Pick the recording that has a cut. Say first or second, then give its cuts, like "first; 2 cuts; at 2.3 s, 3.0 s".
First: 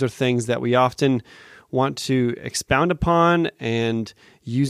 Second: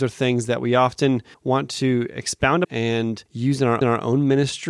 second; 4 cuts; at 1.3 s, 2.6 s, 3.3 s, 3.8 s